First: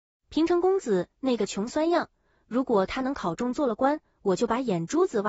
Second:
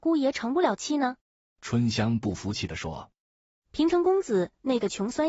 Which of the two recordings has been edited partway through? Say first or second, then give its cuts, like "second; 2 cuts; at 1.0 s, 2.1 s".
second; 1 cut; at 1.2 s